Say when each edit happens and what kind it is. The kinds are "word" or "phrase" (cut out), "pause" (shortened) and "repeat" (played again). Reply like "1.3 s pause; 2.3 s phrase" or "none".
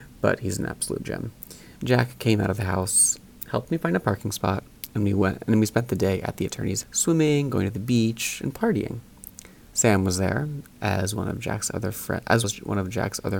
1.8 s pause; 6.8 s word; 12.4 s word

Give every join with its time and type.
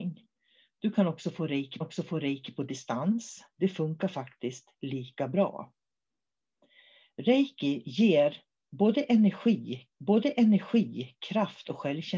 1.8 s repeat; 9.9 s repeat

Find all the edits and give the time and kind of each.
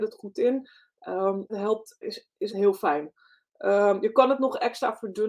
1.5 s word; 2.0 s word; 2.5 s word

